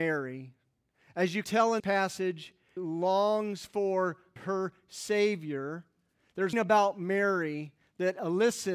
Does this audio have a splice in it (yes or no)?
yes